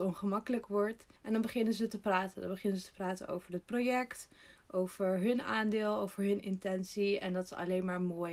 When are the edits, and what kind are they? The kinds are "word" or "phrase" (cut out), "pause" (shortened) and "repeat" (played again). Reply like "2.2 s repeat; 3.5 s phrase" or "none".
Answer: 1.2 s pause